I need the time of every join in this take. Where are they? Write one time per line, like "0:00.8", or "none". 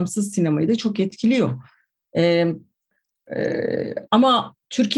none